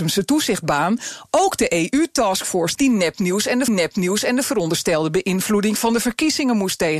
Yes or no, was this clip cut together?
yes